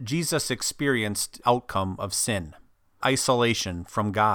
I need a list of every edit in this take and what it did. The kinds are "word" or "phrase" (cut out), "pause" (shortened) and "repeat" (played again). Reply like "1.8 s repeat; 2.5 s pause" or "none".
1.4 s phrase; 3.0 s word

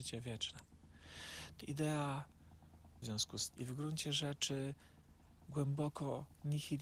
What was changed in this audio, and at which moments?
1.6 s word; 3.0 s word; 3.5 s word

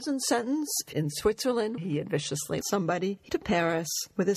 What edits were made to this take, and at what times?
0.9 s word; 1.8 s word; 2.6 s word; 3.3 s word

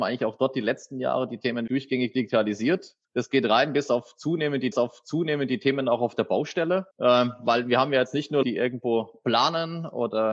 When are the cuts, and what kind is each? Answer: 1.7 s word; 3.0 s pause; 4.7 s repeat; 6.9 s pause; 8.4 s word

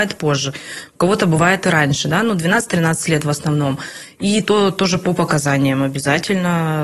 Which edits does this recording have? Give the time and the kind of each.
none

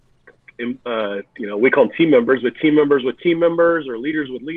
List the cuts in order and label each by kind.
none

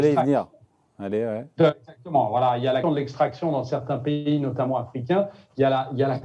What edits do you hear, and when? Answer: 2.8 s word

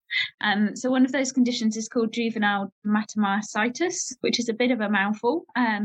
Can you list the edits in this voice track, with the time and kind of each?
none

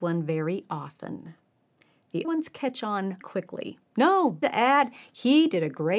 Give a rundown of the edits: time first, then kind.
2.2 s word; 3.2 s word; 4.4 s word

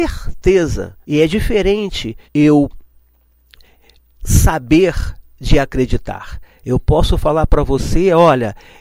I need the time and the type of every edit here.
1.0 s pause; 2.2 s pause

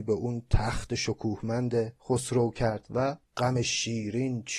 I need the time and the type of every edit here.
none

